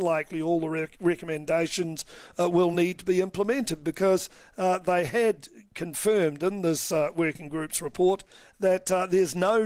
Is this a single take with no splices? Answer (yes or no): yes